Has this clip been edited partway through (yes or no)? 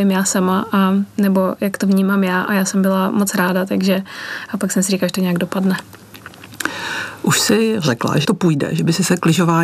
yes